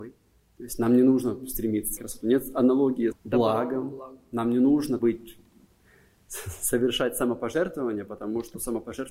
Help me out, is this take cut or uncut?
cut